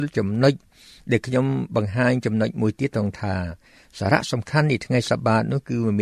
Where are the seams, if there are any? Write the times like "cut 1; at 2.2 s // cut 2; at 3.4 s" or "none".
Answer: none

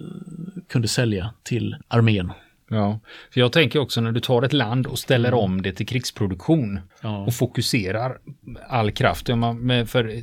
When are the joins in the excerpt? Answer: cut 1; at 1.8 s // cut 2; at 6.9 s

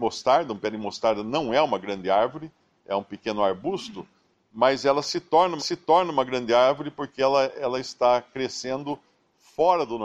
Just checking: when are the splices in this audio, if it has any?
cut 1; at 5.6 s

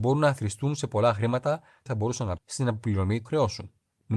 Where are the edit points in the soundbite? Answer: cut 1; at 1.9 s // cut 2; at 2.4 s // cut 3; at 3.3 s

